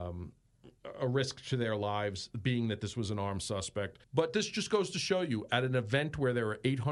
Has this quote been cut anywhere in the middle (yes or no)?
yes